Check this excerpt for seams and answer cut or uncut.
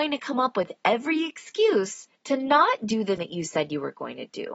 cut